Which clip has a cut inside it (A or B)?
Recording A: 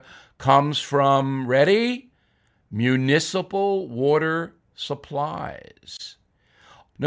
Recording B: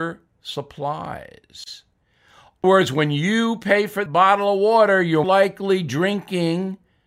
B